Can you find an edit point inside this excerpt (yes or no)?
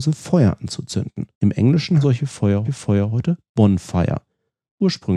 yes